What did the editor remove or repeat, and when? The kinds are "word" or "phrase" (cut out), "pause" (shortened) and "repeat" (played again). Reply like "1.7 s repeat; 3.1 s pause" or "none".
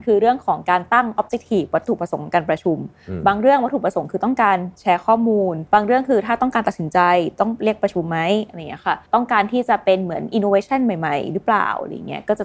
5.7 s pause; 9.1 s pause